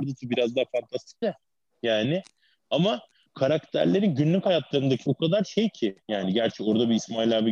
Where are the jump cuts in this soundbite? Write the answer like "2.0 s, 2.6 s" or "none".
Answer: 1.2 s, 3.3 s, 5.1 s, 6.0 s